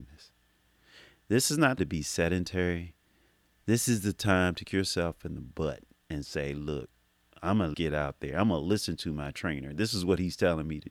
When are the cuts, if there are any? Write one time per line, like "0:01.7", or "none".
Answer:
0:01.8
0:04.6
0:07.7